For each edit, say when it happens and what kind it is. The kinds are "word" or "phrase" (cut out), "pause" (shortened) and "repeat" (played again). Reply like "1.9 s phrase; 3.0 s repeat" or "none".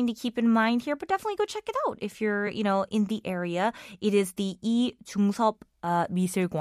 none